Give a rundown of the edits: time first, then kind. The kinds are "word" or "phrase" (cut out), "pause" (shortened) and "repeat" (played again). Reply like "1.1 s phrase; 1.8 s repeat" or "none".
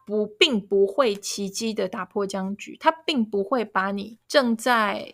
4.2 s pause